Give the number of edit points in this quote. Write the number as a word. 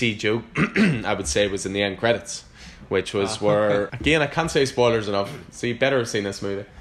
one